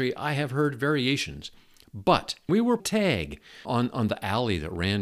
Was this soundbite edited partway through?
yes; 3 cuts; at 2.5 s, 2.8 s, 3.6 s

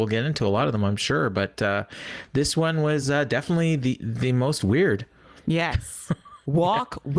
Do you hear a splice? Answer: no; 0 cuts

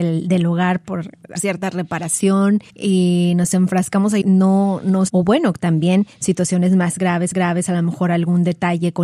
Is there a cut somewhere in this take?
yes; 5 cuts; at 1.3 s, 2.7 s, 4.2 s, 5.1 s, 7.3 s

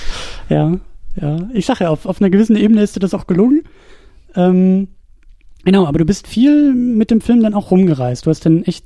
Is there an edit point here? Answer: no; 0 cuts

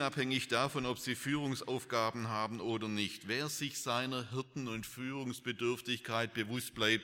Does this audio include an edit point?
no; 0 cuts

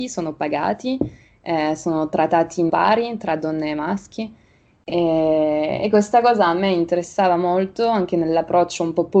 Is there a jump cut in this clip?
yes; 1 cut; at 2.7 s

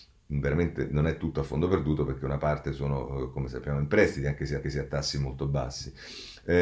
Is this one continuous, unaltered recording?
no; 1 cut; at 4.6 s

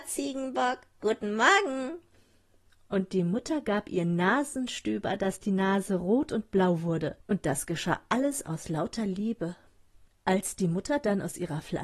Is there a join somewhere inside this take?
yes; 1 cut; at 7.2 s

